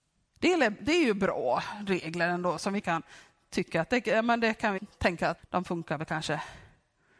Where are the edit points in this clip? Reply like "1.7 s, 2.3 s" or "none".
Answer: 2.8 s, 4.8 s, 5.4 s